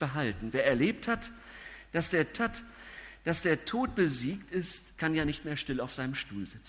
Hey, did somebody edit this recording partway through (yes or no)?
yes